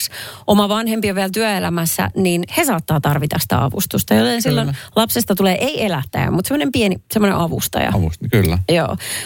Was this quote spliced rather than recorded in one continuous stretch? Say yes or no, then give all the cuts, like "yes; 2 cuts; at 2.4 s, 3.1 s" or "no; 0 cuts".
no; 0 cuts